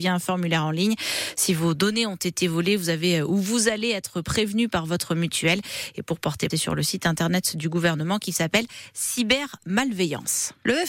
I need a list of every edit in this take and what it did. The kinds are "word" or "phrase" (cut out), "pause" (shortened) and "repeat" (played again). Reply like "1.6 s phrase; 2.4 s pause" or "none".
6.5 s word